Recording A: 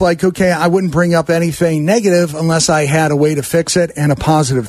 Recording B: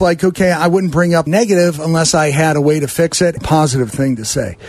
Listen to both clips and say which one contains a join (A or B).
B